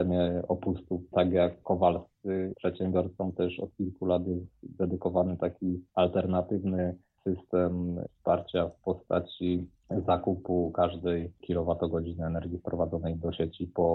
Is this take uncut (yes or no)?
no